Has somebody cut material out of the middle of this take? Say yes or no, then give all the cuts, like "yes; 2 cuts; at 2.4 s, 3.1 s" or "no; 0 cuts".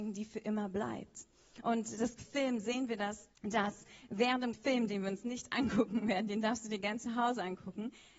yes; 3 cuts; at 2.2 s, 3.3 s, 4.5 s